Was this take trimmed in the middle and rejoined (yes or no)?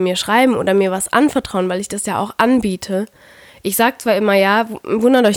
no